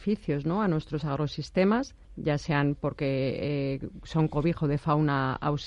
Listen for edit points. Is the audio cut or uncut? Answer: cut